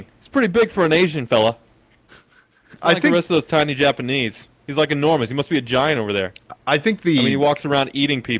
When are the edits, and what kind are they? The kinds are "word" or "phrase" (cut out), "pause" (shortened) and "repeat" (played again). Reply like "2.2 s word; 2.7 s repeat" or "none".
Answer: none